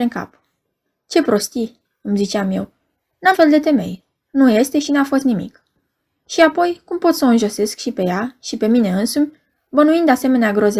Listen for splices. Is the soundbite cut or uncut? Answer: cut